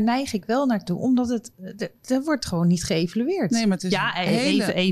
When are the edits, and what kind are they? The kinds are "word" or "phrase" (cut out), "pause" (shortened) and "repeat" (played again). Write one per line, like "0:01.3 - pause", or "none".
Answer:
none